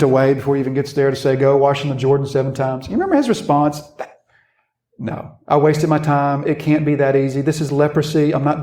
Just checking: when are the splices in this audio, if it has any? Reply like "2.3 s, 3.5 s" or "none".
none